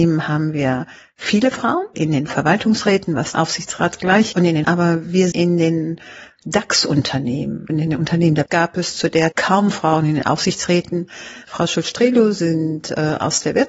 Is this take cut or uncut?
cut